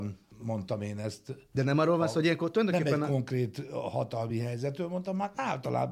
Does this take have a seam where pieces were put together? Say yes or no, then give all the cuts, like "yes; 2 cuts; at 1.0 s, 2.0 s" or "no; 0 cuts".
no; 0 cuts